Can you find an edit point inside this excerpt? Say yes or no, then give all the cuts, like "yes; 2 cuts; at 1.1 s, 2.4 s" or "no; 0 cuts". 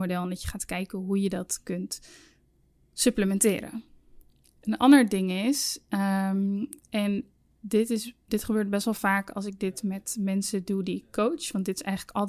no; 0 cuts